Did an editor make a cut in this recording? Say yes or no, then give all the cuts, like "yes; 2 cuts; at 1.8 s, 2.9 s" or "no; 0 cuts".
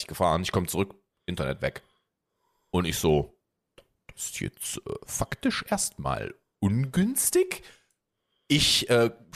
no; 0 cuts